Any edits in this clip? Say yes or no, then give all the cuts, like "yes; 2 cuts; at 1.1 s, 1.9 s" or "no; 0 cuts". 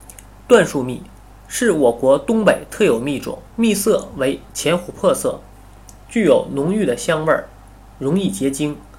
yes; 2 cuts; at 1.3 s, 3.5 s